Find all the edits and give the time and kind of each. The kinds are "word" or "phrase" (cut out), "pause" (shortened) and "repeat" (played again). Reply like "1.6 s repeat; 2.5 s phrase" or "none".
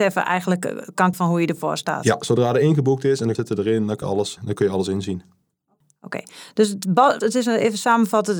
1.1 s word; 3.4 s word; 4.0 s word; 4.4 s word; 7.2 s word